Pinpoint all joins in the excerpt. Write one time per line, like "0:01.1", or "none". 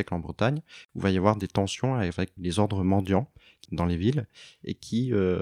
0:02.4
0:03.6